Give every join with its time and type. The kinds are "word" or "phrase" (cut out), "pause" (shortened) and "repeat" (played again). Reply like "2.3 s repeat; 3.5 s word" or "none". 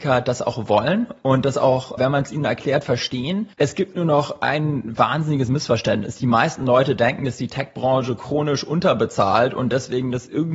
2.0 s word; 3.5 s pause